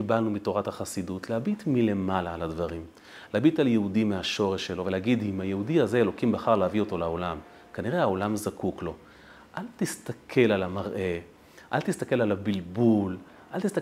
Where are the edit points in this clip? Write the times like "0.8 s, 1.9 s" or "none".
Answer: none